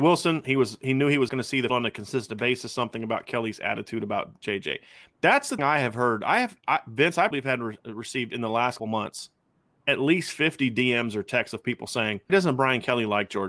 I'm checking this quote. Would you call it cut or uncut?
cut